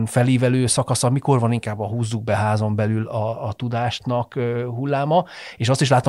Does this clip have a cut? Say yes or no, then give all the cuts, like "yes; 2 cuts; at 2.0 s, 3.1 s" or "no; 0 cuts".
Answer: no; 0 cuts